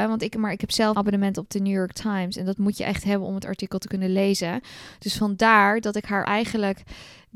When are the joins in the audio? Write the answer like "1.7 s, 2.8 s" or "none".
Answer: 0.9 s, 6.2 s